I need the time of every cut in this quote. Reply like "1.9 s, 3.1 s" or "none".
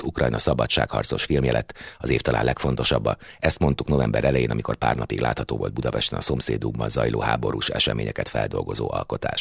none